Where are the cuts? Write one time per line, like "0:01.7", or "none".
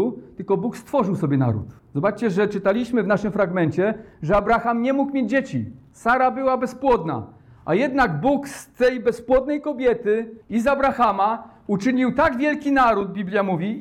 0:01.8
0:10.4